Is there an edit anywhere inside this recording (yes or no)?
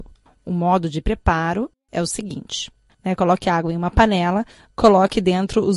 no